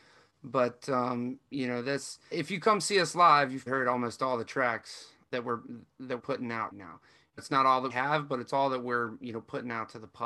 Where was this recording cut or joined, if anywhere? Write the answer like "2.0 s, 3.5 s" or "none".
2.3 s, 3.7 s, 5.2 s, 6.2 s, 6.7 s, 7.4 s, 7.9 s